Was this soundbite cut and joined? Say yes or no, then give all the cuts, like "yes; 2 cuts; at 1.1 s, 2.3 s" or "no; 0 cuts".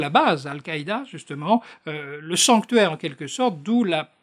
no; 0 cuts